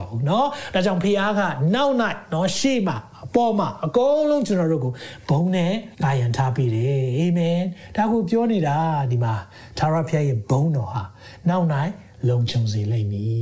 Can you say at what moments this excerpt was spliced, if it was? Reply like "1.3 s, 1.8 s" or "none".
5.9 s